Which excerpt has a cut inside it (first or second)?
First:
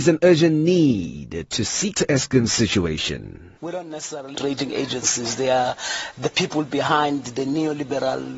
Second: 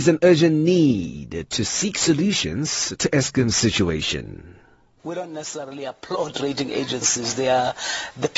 first